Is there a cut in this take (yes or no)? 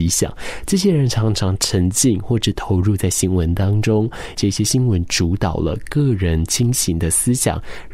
yes